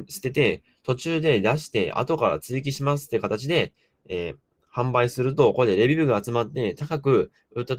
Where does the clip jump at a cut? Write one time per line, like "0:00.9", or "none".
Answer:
none